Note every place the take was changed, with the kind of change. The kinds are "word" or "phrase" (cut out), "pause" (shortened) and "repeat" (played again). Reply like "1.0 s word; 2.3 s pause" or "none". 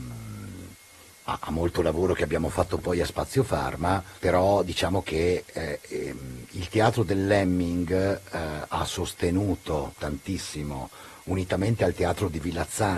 4.2 s pause